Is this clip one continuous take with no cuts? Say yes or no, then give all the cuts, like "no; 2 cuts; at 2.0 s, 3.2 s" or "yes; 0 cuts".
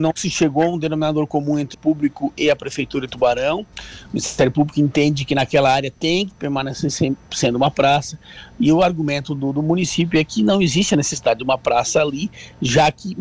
no; 1 cut; at 1.7 s